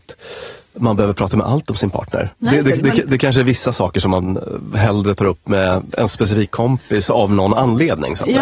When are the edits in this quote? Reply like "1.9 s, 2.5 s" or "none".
2.3 s